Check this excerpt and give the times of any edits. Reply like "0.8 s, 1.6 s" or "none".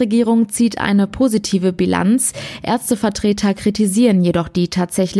none